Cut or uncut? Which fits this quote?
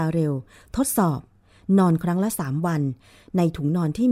uncut